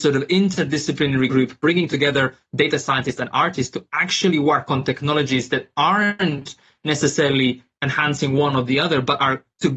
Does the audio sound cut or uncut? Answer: uncut